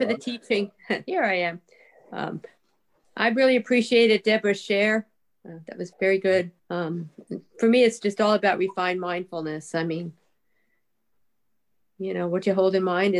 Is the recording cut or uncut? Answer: cut